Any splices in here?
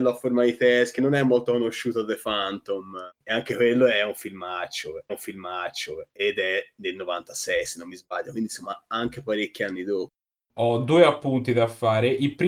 yes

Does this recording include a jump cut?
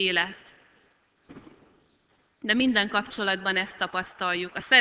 no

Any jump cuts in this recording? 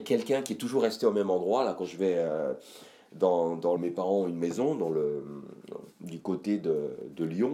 yes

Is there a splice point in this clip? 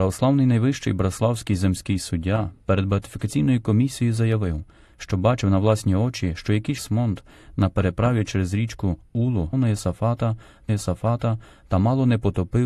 yes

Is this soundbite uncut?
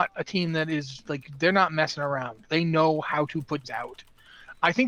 no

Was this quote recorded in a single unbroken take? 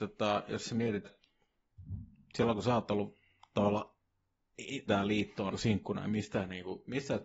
no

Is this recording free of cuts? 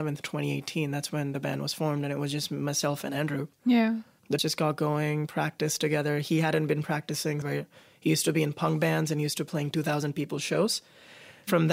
no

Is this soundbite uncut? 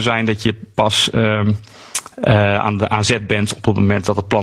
yes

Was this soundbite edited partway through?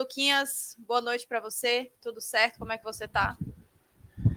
no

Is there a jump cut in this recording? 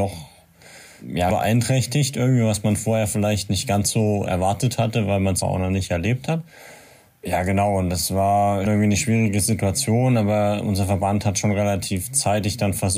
yes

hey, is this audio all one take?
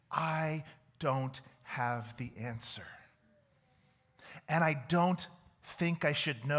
yes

